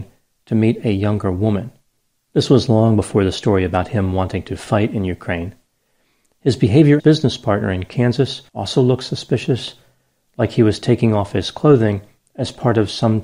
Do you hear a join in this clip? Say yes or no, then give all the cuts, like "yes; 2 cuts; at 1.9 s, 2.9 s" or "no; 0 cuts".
yes; 2 cuts; at 7.0 s, 8.5 s